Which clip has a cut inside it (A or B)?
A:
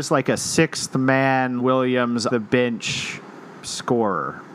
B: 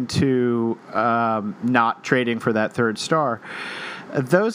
A